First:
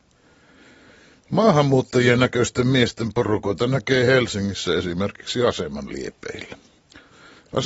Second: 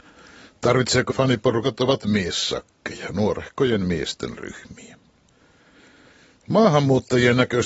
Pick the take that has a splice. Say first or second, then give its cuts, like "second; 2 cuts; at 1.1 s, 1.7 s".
second; 1 cut; at 1.1 s